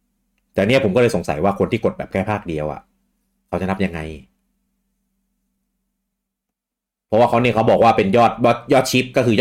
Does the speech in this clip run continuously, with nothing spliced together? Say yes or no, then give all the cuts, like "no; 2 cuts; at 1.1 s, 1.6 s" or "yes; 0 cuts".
yes; 0 cuts